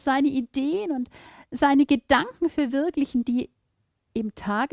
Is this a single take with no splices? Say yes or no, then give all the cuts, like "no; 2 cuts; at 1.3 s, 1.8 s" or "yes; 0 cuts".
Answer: yes; 0 cuts